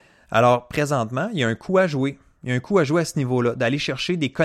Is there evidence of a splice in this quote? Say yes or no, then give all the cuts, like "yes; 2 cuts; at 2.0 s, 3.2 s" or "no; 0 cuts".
no; 0 cuts